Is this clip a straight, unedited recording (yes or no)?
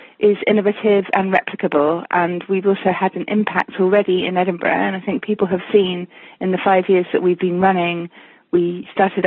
yes